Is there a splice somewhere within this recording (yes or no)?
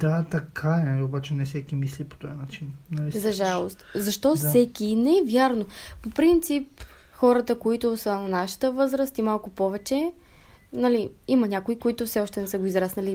no